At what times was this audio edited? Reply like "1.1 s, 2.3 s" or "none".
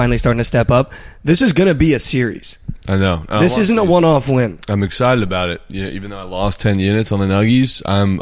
none

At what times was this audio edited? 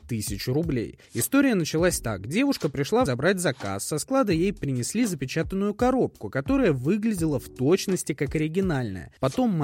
1.0 s, 3.1 s

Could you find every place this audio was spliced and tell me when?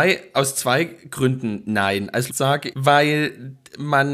2.3 s, 2.7 s

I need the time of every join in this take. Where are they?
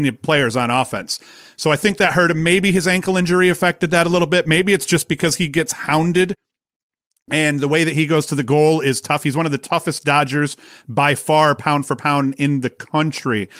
none

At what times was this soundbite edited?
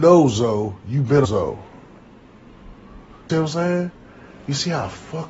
1.2 s, 3.3 s

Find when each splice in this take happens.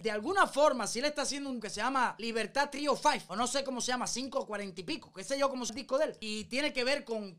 1.6 s, 5.7 s

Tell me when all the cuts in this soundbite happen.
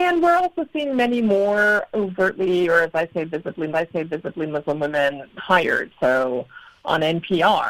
1.9 s, 3.7 s, 5.4 s

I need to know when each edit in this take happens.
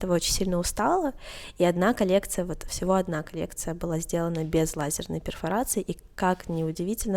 none

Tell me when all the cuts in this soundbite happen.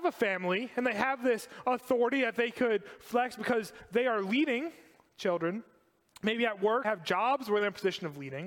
6.8 s

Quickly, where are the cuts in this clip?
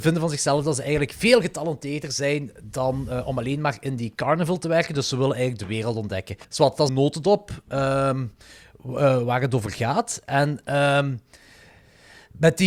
6.4 s, 6.9 s

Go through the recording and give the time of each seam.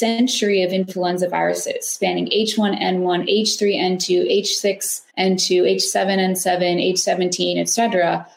5.1 s

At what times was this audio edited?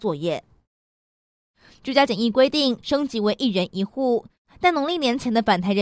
none

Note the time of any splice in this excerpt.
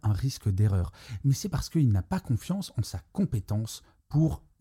none

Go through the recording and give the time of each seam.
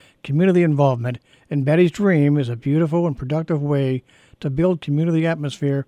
none

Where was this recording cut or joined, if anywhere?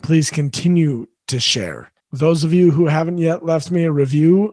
2.0 s

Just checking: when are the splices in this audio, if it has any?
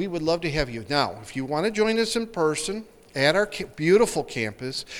none

